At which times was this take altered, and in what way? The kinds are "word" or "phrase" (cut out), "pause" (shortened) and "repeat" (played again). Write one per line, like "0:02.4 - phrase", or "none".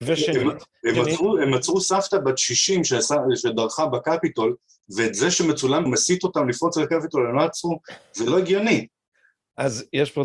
0:00.9 - word
0:05.9 - word